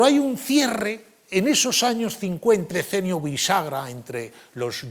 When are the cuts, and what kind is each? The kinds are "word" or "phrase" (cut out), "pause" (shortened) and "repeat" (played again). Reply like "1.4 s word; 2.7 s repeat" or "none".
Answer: 2.7 s word